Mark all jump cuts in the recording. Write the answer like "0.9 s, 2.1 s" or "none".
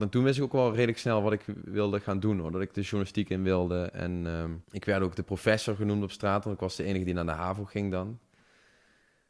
4.6 s